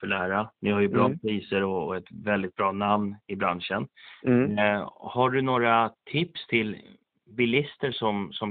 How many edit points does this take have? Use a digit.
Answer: 0